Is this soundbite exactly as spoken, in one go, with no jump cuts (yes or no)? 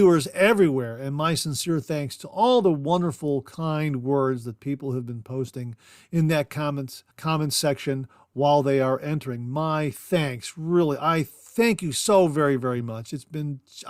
no